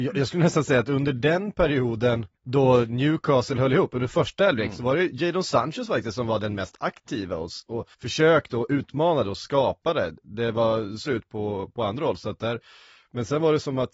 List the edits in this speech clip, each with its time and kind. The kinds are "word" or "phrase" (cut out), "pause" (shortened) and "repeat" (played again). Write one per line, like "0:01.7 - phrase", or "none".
0:02.4 - pause
0:07.9 - pause
0:11.1 - phrase